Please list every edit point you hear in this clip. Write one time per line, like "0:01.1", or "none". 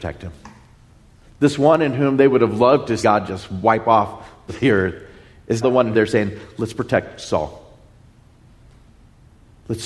0:03.0
0:04.5
0:05.6
0:05.9